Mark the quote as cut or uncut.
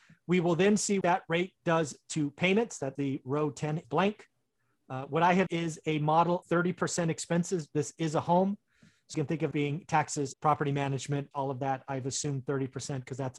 cut